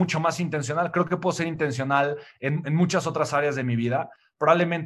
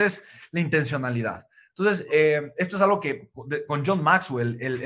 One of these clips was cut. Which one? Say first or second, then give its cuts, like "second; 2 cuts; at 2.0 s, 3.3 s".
second; 1 cut; at 2.1 s